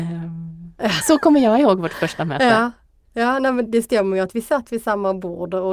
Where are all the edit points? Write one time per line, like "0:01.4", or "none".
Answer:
0:03.7